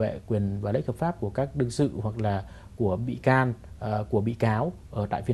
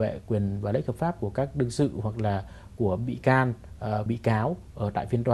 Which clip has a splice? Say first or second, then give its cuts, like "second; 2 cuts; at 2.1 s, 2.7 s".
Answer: second; 1 cut; at 4.1 s